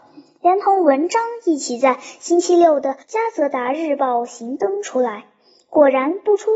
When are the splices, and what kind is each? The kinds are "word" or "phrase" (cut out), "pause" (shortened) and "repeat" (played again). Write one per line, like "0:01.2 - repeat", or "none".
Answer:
0:03.0 - pause